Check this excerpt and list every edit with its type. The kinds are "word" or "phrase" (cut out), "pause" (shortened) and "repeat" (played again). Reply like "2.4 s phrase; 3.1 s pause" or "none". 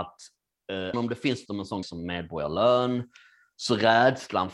0.9 s word; 1.5 s word; 1.8 s word